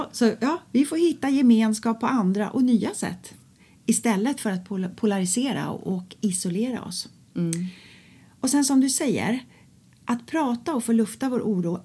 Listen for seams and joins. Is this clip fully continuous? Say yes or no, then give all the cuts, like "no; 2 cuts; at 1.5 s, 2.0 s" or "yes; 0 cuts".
yes; 0 cuts